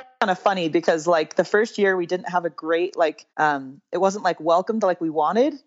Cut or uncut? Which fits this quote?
cut